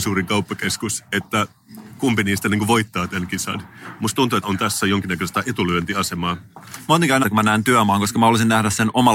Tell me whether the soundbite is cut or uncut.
cut